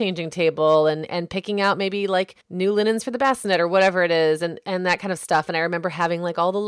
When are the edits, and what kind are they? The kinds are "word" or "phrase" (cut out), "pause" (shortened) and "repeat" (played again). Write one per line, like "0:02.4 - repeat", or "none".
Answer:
0:02.4 - pause